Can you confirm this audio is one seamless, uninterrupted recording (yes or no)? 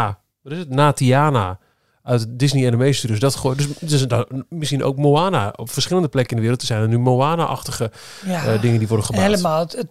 yes